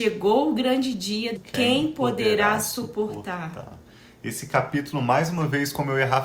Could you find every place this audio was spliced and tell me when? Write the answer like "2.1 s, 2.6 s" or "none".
1.4 s